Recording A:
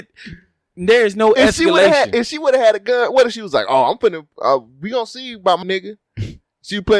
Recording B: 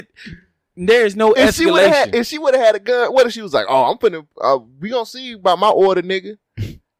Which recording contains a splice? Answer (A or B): A